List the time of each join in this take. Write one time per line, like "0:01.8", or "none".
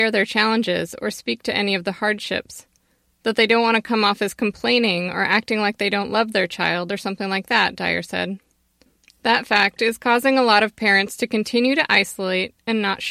none